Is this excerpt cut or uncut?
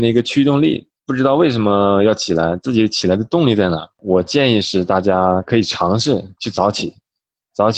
cut